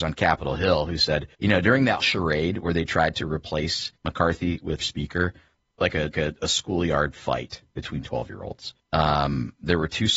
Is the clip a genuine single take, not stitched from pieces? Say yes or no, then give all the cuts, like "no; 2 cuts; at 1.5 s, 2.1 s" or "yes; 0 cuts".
no; 7 cuts; at 1.3 s, 2.0 s, 4.0 s, 4.8 s, 5.6 s, 6.1 s, 8.8 s